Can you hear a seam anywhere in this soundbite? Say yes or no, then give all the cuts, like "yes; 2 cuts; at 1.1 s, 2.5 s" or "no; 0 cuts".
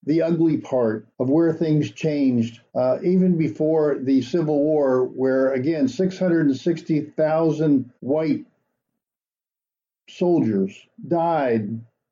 yes; 3 cuts; at 1.1 s, 2.7 s, 8.0 s